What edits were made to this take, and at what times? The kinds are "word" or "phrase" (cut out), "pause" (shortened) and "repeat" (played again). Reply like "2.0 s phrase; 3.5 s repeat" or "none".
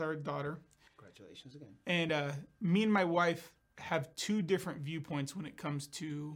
none